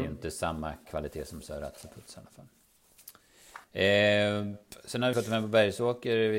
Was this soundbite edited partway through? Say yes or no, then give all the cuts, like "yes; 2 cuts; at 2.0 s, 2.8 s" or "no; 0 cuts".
yes; 2 cuts; at 3.6 s, 5.1 s